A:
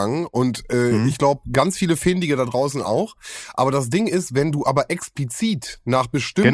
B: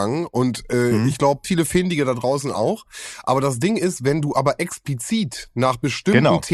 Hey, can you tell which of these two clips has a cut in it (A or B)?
B